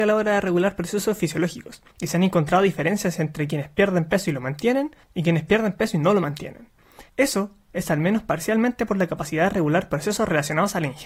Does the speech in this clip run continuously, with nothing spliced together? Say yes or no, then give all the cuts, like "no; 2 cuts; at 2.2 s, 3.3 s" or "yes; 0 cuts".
no; 3 cuts; at 1.9 s, 5.0 s, 7.1 s